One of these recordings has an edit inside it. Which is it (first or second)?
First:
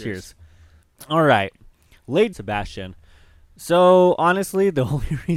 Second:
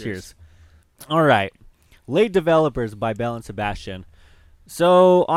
first